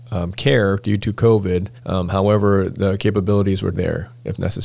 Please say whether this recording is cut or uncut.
cut